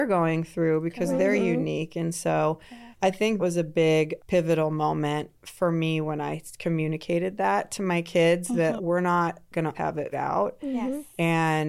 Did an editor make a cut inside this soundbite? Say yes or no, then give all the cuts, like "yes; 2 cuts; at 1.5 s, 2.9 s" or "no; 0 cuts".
yes; 6 cuts; at 2.9 s, 3.4 s, 4.2 s, 8.8 s, 9.7 s, 10.1 s